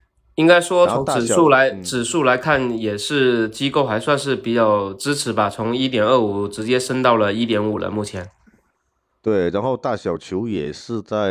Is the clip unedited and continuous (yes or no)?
yes